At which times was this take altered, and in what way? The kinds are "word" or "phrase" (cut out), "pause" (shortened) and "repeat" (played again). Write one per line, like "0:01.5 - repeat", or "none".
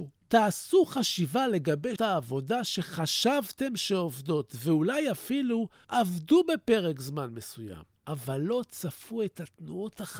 0:02.0 - word

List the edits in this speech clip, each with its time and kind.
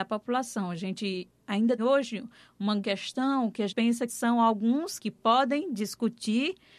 0:01.8 - word
0:02.8 - word
0:03.7 - word
0:04.1 - word
0:05.0 - word

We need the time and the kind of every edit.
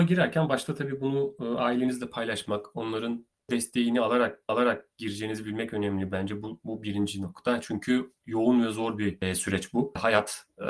0:04.5 - repeat

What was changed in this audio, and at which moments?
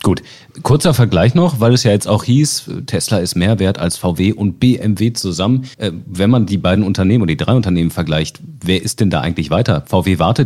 0:05.7 - pause

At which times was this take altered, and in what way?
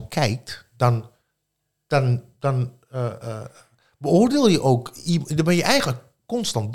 none

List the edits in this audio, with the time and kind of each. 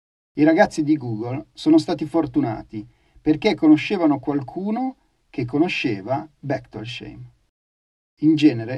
none

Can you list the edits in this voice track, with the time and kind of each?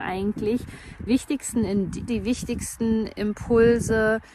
0:01.1 - word
0:02.1 - word

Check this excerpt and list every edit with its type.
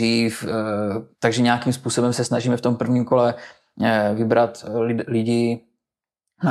0:01.1 - pause

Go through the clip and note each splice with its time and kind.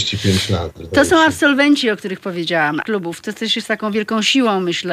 0:02.8 - word

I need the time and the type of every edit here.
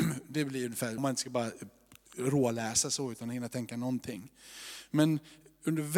0:01.0 - word

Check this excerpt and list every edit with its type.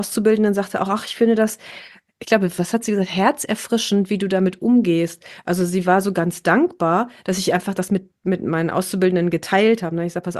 none

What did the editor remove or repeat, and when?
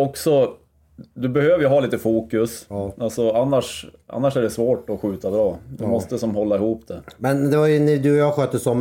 none

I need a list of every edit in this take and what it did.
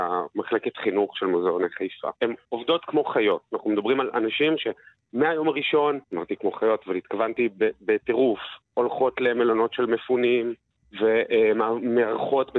0:02.2 - pause
0:03.5 - pause
0:06.0 - pause

